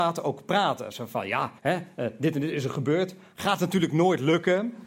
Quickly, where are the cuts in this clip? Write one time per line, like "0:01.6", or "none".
0:01.6